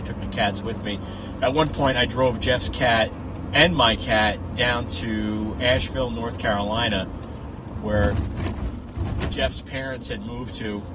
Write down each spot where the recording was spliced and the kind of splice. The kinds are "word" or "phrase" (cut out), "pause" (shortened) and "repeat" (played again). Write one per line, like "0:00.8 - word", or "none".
none